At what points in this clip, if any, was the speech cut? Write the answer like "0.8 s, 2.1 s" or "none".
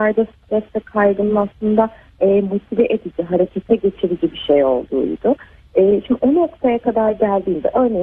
none